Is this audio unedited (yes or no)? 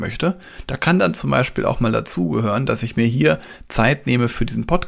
yes